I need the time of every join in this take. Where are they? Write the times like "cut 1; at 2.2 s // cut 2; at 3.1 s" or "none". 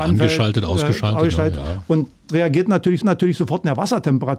cut 1; at 2.3 s // cut 2; at 3.0 s